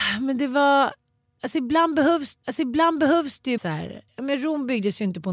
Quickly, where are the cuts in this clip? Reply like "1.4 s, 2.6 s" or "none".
2.4 s, 3.6 s, 4.1 s